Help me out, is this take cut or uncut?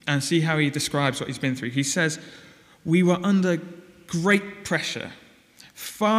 uncut